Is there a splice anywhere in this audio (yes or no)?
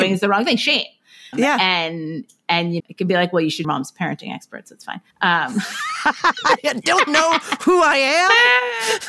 yes